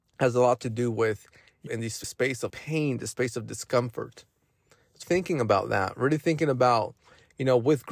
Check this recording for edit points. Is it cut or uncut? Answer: cut